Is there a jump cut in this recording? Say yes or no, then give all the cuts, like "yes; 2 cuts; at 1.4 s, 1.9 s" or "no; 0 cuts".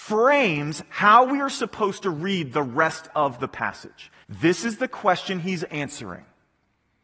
yes; 1 cut; at 4.2 s